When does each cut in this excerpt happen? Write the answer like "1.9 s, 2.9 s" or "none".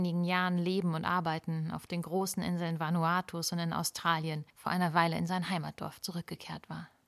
4.5 s